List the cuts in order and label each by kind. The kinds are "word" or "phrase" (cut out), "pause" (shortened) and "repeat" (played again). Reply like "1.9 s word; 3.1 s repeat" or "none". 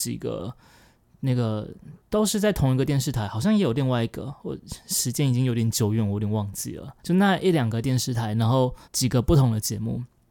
2.0 s pause; 7.0 s pause; 8.8 s pause

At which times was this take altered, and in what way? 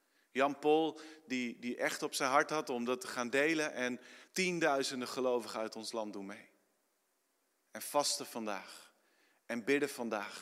4.3 s pause

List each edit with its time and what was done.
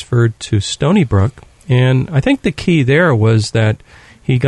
none

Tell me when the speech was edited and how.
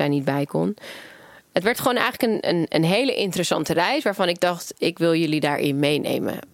none

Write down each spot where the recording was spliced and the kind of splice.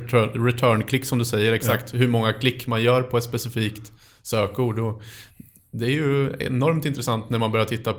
none

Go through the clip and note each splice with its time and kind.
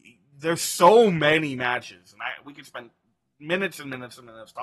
none

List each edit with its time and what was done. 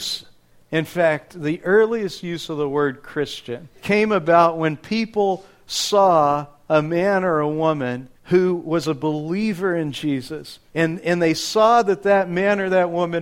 3.7 s pause; 8.2 s pause; 10.7 s pause

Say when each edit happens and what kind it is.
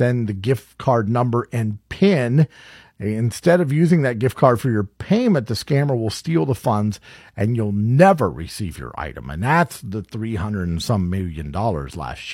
none

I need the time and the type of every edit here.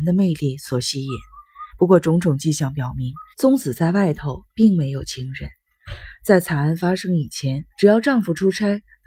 1.7 s pause; 3.3 s pause; 7.7 s pause

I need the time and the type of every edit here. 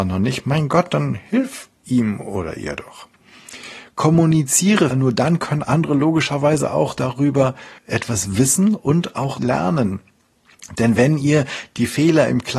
4.9 s word; 7.8 s pause; 9.4 s word

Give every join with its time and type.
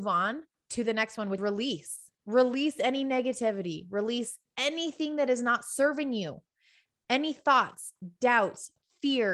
1.4 s word; 2.2 s pause

